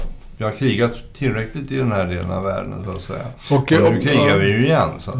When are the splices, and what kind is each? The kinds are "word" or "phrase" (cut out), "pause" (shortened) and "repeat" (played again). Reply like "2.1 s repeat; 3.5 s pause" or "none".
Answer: none